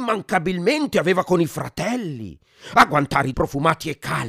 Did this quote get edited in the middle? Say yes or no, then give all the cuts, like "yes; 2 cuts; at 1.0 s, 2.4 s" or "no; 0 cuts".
yes; 1 cut; at 3.3 s